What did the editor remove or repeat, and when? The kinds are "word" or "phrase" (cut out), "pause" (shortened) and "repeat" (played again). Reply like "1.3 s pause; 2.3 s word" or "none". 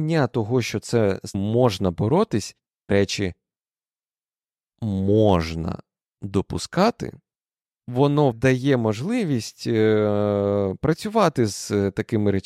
1.3 s word; 2.9 s phrase; 8.3 s word